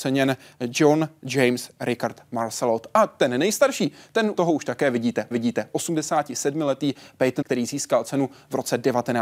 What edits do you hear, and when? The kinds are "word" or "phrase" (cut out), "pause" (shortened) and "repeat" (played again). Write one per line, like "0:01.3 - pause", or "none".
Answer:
0:04.4 - word
0:05.3 - repeat
0:07.4 - word